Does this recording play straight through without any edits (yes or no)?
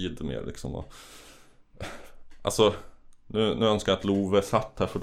yes